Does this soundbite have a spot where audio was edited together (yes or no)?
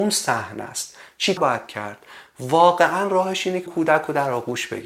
yes